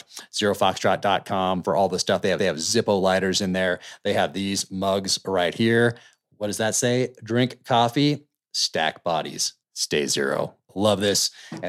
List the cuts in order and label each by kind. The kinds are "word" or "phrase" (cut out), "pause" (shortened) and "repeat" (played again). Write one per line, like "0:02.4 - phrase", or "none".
0:02.4 - repeat
0:09.6 - pause